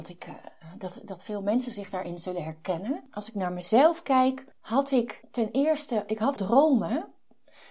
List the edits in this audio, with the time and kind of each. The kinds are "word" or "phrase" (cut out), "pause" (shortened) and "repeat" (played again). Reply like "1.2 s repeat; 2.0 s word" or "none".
4.5 s pause; 6.4 s word